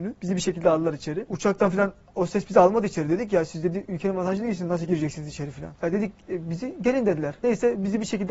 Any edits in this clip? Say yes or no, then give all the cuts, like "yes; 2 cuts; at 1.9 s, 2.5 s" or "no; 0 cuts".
no; 0 cuts